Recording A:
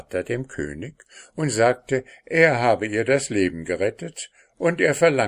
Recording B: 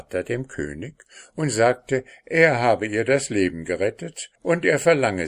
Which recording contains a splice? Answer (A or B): B